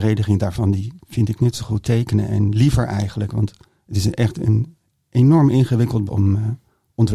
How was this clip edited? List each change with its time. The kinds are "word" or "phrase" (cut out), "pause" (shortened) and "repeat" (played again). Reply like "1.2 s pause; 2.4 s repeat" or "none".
1.8 s word; 3.7 s pause; 4.9 s pause; 6.1 s word